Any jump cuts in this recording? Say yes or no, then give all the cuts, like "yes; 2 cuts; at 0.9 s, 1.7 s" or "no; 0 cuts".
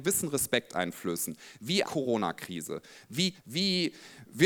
yes; 2 cuts; at 1.8 s, 3.3 s